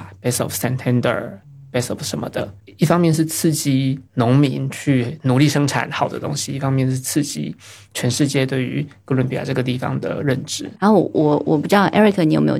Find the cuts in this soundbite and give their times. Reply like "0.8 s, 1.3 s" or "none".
4.1 s